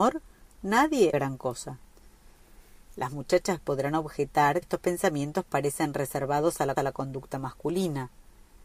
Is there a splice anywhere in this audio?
yes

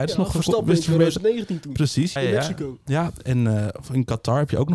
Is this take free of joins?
no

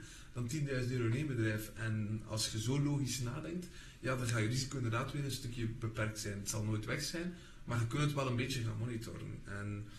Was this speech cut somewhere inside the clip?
no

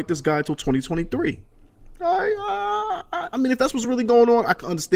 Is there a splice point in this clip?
no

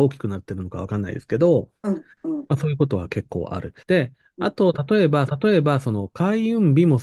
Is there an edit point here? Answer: yes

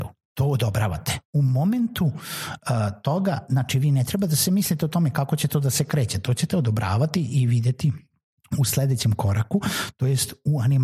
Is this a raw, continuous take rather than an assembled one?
yes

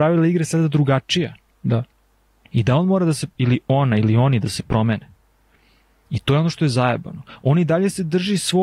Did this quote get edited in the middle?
no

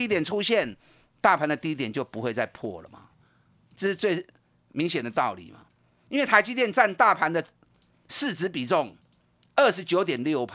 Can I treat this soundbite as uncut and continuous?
yes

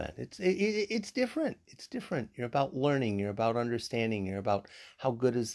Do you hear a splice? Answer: no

